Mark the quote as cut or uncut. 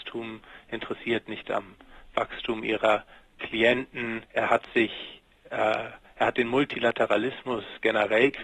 cut